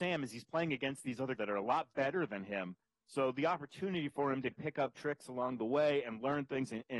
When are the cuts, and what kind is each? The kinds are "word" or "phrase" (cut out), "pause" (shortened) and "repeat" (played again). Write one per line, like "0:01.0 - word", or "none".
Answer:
0:01.4 - word
0:04.5 - word